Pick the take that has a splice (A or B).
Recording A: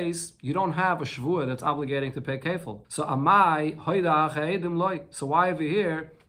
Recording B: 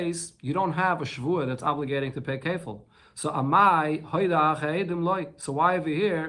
A